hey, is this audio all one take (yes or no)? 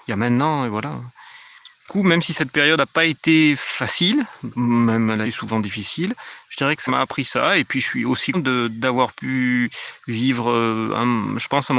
no